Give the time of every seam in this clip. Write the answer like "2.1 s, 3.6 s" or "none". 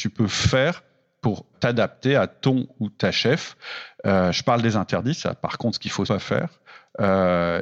1.5 s, 6.1 s

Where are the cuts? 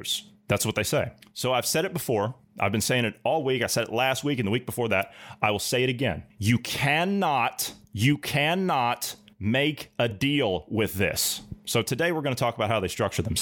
none

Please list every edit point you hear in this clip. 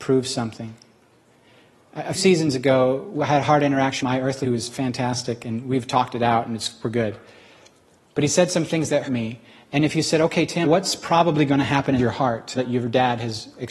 2.1 s, 4.0 s, 4.4 s, 9.0 s, 10.6 s, 12.0 s, 12.5 s

